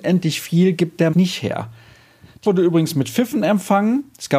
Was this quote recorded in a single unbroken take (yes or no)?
no